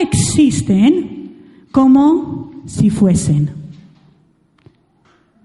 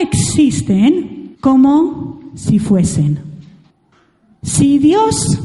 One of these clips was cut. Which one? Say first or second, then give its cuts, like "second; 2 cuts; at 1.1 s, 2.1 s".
second; 2 cuts; at 1.3 s, 3.7 s